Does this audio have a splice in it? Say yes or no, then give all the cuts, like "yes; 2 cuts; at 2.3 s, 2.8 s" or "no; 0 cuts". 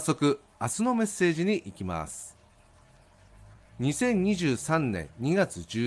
no; 0 cuts